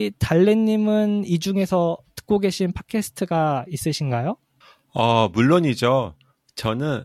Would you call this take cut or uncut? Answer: cut